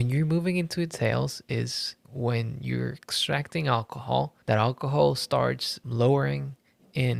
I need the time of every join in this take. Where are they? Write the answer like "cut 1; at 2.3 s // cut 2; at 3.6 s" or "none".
cut 1; at 2.0 s // cut 2; at 4.4 s // cut 3; at 5.8 s